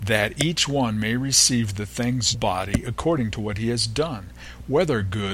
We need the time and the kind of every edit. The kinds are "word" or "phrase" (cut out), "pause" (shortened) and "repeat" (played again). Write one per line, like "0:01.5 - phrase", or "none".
0:02.3 - phrase